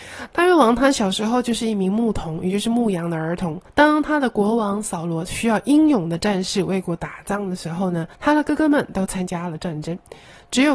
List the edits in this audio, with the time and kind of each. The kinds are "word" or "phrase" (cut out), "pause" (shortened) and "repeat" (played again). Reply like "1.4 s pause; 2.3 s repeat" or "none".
3.7 s pause; 8.1 s pause